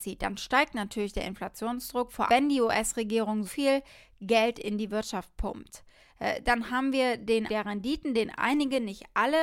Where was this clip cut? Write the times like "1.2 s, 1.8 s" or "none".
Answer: 2.3 s, 3.4 s, 7.5 s

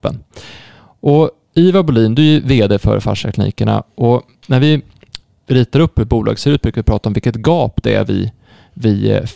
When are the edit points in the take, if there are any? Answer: none

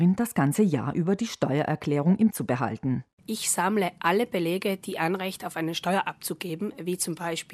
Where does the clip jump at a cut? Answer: 2.3 s

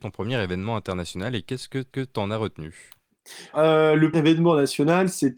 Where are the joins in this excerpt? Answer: 1.9 s, 3.5 s, 4.1 s

